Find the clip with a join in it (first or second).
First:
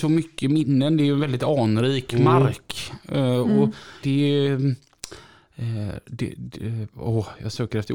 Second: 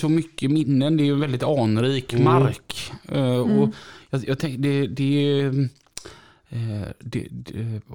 first